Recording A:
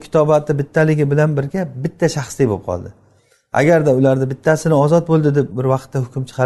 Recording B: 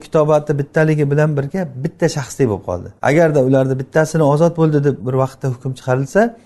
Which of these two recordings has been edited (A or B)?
B